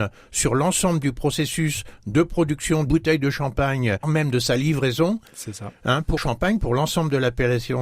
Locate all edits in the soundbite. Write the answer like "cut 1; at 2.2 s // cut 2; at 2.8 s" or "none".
cut 1; at 2.9 s // cut 2; at 4.0 s // cut 3; at 6.2 s